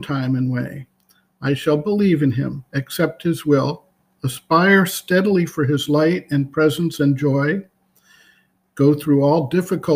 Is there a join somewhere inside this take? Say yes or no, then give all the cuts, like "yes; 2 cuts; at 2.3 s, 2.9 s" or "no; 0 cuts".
no; 0 cuts